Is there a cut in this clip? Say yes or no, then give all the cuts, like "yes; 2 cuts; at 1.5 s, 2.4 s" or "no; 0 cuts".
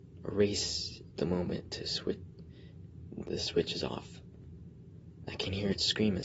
yes; 2 cuts; at 1.2 s, 3.2 s